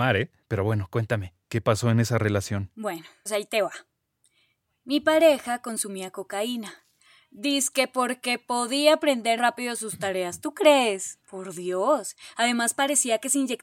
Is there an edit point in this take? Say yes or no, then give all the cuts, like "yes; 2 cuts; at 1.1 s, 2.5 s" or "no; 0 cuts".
yes; 3 cuts; at 3.3 s, 9.4 s, 11.2 s